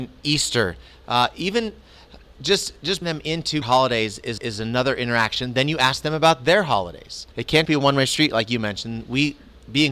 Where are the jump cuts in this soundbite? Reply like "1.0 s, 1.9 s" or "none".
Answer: 3.0 s, 3.6 s, 4.4 s, 7.3 s, 7.7 s